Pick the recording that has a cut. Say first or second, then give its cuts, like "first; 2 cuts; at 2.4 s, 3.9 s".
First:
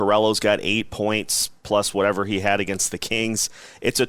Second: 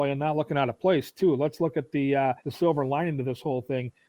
second; 1 cut; at 2.4 s